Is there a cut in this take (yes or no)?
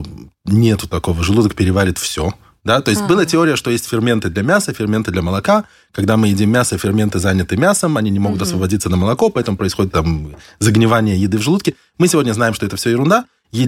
yes